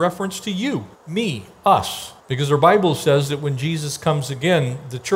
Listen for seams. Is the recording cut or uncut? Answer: cut